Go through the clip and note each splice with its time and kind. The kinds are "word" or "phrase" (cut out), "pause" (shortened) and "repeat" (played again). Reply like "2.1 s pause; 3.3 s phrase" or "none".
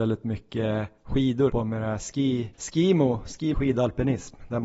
1.5 s phrase; 2.5 s pause; 3.5 s word